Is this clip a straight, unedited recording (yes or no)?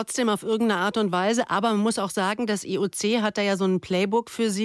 yes